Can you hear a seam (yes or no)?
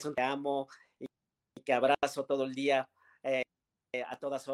no